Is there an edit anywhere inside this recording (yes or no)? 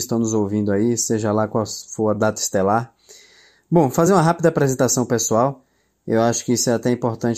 no